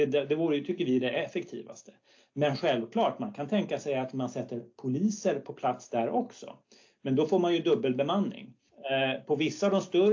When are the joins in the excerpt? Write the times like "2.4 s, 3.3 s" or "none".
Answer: none